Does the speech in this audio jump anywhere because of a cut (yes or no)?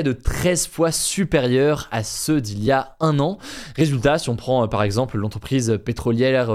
no